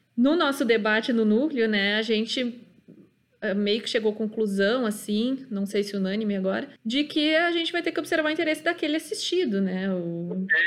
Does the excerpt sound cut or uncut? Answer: cut